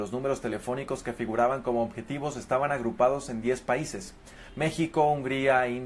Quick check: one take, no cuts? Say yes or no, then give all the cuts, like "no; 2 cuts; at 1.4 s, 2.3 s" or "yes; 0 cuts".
yes; 0 cuts